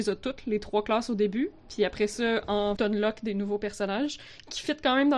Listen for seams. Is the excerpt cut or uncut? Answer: cut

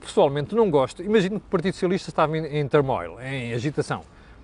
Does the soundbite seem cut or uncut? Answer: uncut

